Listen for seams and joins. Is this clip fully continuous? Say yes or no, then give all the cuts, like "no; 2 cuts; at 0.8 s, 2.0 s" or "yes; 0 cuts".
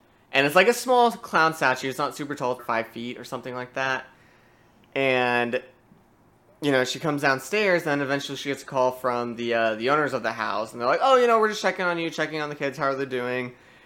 no; 1 cut; at 2.6 s